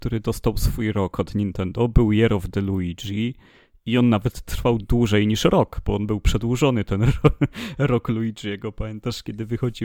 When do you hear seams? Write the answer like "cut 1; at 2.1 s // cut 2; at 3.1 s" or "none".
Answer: cut 1; at 4.8 s